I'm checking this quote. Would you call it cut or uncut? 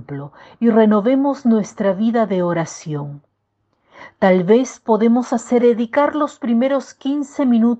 cut